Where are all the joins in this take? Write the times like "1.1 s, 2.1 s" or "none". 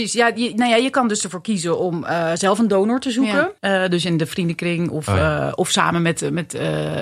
3.6 s